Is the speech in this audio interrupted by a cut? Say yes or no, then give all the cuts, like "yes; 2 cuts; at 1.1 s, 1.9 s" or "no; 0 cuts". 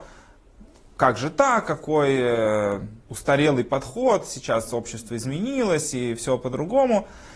yes; 1 cut; at 3.0 s